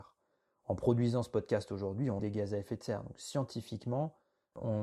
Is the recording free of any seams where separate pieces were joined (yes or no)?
no